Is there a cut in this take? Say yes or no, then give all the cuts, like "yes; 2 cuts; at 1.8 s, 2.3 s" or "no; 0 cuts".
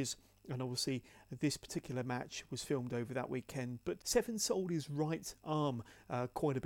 yes; 1 cut; at 4.0 s